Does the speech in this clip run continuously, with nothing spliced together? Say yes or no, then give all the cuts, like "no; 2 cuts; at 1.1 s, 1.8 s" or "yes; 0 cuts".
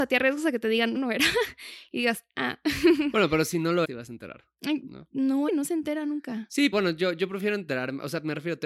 no; 4 cuts; at 1.0 s, 3.8 s, 5.5 s, 6.7 s